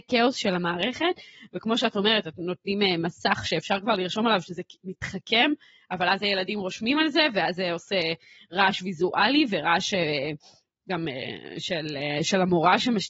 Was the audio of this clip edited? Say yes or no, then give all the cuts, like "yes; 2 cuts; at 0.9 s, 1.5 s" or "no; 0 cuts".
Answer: no; 0 cuts